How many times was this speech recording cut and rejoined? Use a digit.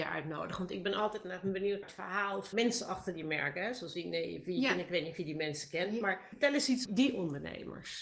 4